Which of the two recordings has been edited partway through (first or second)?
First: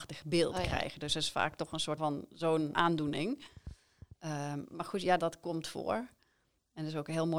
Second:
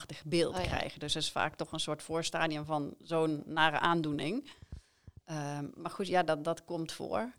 first